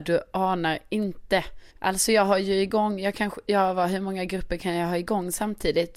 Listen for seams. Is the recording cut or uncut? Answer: cut